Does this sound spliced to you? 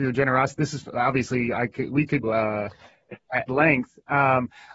yes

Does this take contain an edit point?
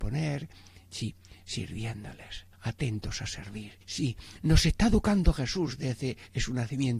yes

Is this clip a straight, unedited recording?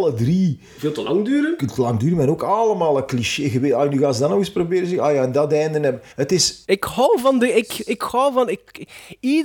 no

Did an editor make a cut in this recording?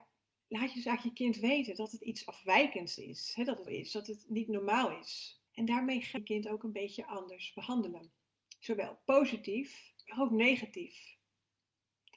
yes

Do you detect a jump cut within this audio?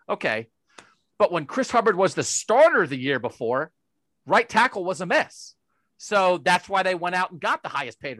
no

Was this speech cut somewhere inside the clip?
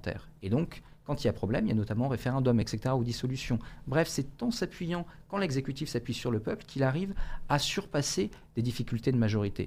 no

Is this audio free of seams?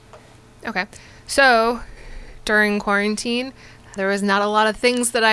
no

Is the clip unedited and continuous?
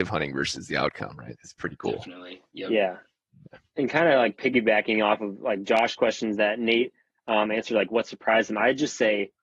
yes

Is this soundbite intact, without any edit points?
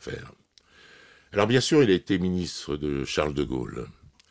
yes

